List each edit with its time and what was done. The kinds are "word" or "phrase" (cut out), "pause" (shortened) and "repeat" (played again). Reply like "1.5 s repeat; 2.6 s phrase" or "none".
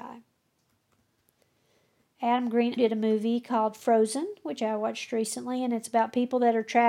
2.8 s word

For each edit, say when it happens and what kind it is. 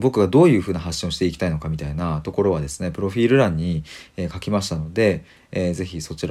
none

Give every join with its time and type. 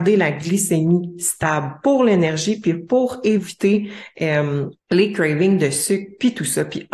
4.8 s pause

